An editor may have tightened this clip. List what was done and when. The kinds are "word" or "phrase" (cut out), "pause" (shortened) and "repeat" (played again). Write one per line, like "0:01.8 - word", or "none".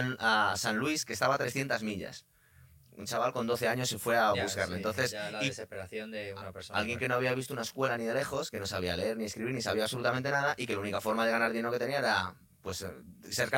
none

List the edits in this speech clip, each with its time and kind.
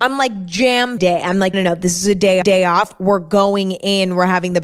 0:01.0 - phrase
0:01.5 - word
0:02.4 - repeat

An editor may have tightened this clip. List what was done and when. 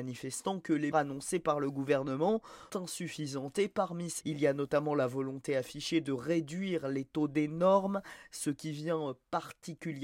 0:00.9 - word
0:02.7 - word
0:04.2 - word

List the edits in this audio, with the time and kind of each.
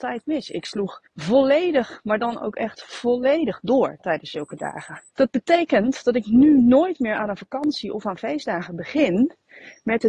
0:01.1 - pause
0:05.1 - pause

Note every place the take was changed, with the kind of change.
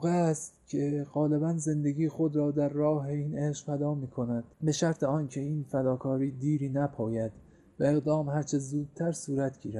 0:04.5 - pause

